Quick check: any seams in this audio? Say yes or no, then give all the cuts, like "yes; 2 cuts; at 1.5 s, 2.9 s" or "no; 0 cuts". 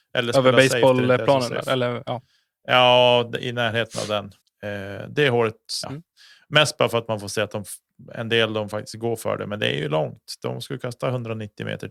yes; 2 cuts; at 4.4 s, 5.8 s